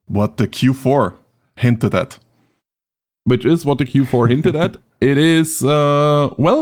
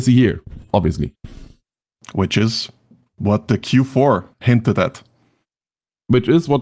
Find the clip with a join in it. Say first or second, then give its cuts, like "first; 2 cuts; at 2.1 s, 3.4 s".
second; 1 cut; at 4.3 s